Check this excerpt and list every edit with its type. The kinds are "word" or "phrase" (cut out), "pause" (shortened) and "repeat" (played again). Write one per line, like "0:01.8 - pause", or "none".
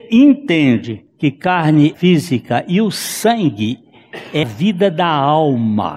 0:01.1 - pause
0:01.9 - phrase
0:04.4 - word